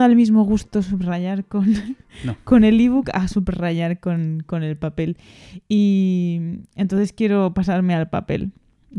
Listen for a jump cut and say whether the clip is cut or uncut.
uncut